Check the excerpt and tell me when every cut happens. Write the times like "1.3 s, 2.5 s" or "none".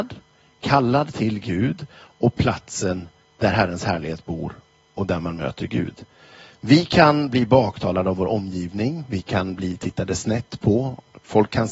none